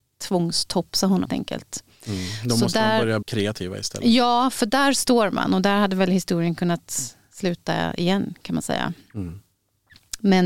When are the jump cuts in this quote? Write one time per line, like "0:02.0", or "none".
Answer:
0:01.3
0:03.2